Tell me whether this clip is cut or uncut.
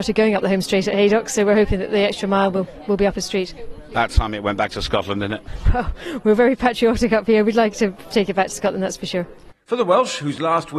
uncut